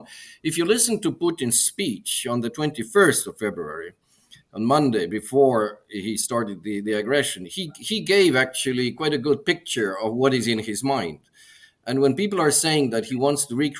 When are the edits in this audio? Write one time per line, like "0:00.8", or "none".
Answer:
none